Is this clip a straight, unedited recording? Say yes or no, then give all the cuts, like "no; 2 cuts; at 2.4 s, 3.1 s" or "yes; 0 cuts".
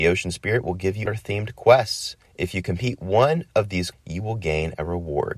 no; 3 cuts; at 1.1 s, 2.3 s, 3.9 s